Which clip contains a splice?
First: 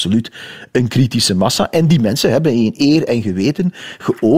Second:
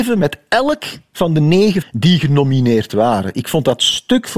second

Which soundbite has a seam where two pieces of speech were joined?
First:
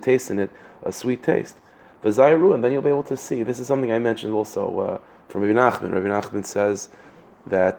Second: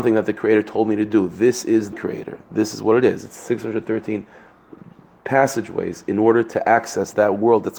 second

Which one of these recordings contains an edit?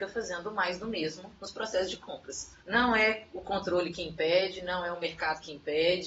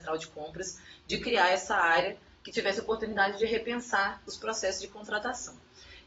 first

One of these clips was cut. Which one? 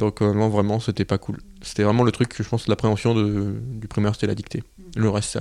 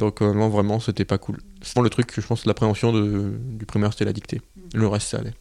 second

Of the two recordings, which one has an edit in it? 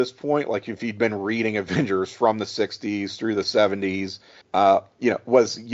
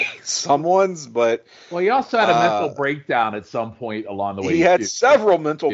first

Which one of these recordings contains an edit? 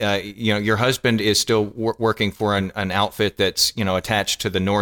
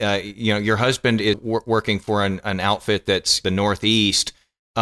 second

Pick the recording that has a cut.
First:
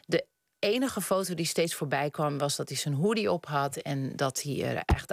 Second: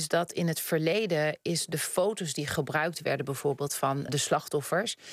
second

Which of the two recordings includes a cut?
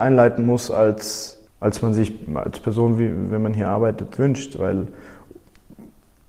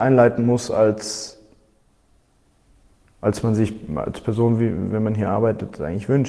first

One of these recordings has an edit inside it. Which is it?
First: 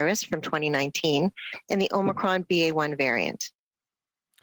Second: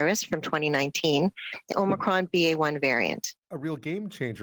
second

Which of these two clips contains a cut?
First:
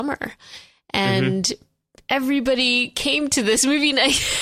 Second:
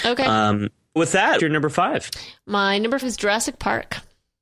second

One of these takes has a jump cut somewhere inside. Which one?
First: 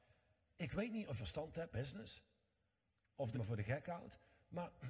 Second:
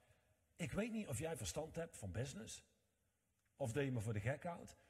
first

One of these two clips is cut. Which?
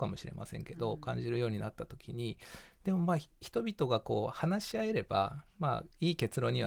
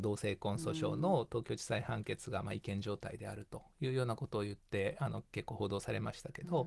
first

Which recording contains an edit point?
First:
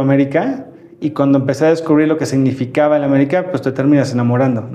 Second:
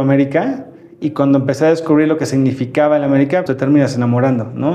second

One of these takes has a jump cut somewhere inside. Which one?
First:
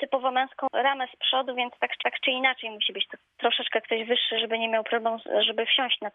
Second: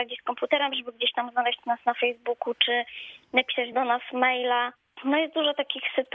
first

